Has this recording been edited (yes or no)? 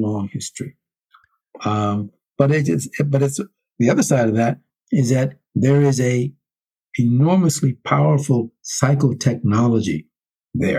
no